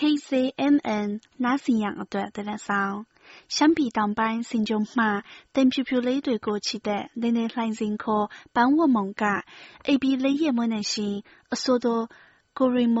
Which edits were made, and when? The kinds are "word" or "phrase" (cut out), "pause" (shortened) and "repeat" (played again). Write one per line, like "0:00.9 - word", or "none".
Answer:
none